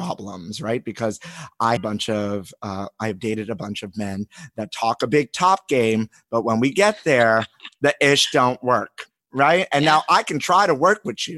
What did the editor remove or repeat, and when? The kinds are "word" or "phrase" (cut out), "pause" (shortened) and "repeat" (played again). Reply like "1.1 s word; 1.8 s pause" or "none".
1.8 s phrase

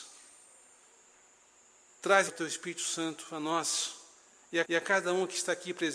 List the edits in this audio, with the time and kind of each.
2.3 s phrase; 4.6 s repeat

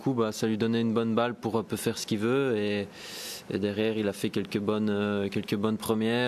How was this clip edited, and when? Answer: none

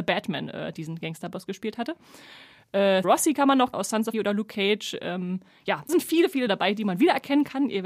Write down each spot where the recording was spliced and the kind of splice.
3.0 s word; 3.7 s word; 4.1 s word; 5.9 s word; 6.5 s word

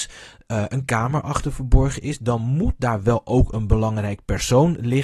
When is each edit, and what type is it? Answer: none

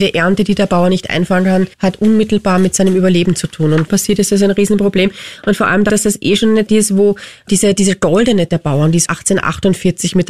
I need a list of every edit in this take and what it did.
1.7 s pause; 3.9 s phrase; 5.9 s phrase; 6.7 s word; 7.5 s word; 8.5 s word; 9.1 s word

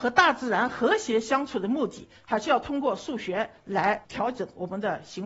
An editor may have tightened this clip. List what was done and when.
4.0 s pause

